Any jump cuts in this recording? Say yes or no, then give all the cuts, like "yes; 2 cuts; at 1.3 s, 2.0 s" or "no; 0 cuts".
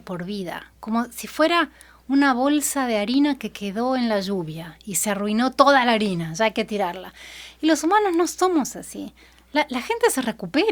no; 0 cuts